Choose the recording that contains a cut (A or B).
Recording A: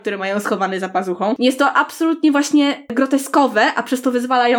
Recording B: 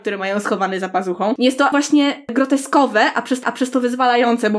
B